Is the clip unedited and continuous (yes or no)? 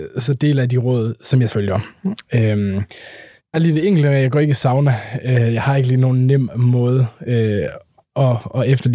no